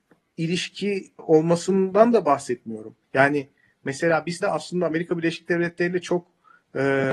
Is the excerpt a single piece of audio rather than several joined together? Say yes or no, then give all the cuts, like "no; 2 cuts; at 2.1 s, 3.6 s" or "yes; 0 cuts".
no; 3 cuts; at 1.2 s, 3.0 s, 4.4 s